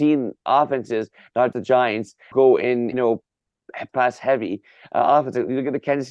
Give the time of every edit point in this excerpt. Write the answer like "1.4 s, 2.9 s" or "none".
1.5 s, 2.3 s, 2.9 s, 3.9 s